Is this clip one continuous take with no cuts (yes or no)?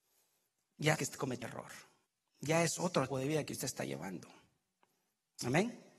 no